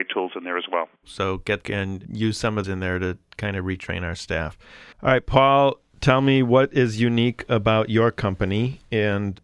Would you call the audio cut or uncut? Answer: cut